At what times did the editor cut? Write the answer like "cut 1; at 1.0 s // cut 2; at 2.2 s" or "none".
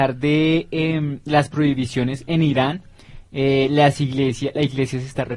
none